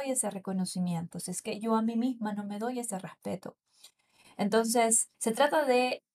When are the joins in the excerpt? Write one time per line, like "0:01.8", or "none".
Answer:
0:05.1